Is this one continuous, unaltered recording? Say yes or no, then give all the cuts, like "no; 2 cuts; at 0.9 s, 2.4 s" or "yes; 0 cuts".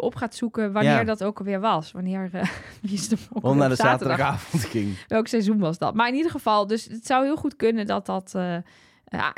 yes; 0 cuts